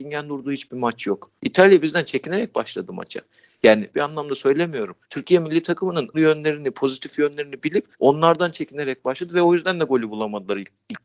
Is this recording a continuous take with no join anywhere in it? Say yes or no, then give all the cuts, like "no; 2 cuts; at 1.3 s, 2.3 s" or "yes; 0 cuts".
no; 5 cuts; at 1.4 s, 3.9 s, 5.0 s, 6.1 s, 7.9 s